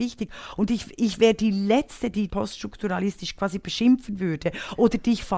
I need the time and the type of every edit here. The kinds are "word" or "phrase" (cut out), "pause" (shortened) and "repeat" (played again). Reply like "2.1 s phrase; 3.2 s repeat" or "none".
2.3 s word